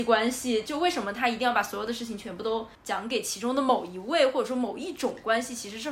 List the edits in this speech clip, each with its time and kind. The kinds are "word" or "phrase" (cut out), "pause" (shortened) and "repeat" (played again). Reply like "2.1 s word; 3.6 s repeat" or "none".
2.7 s pause